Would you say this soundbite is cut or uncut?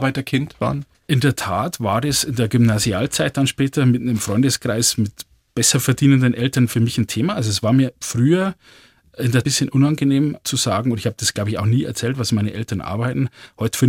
cut